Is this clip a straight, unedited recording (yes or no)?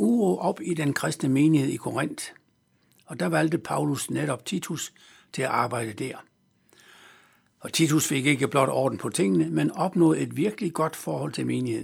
yes